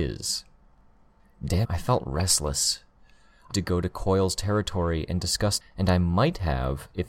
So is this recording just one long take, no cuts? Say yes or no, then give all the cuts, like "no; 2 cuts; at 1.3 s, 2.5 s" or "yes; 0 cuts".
no; 3 cuts; at 1.6 s, 3.5 s, 5.6 s